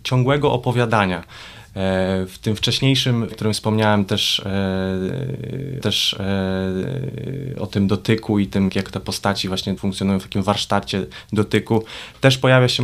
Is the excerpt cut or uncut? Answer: cut